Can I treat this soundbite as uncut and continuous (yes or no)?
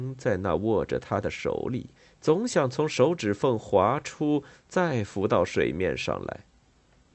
no